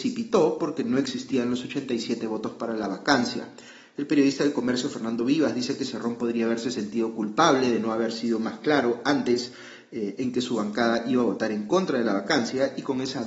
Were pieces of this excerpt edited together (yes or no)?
no